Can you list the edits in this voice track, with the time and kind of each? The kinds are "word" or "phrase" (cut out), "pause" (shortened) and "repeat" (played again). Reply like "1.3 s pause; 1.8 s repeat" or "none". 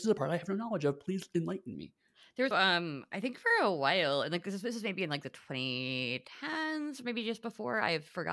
2.5 s word